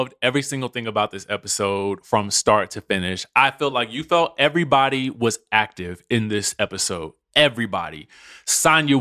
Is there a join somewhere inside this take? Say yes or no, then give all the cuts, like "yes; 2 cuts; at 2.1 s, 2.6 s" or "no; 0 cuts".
no; 0 cuts